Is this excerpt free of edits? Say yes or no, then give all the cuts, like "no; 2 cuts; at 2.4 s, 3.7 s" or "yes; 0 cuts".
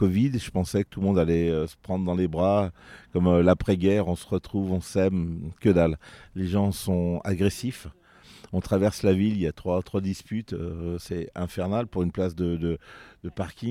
yes; 0 cuts